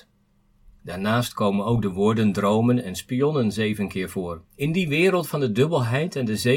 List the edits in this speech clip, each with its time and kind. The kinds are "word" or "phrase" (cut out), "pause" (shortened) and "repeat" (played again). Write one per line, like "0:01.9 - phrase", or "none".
0:04.5 - pause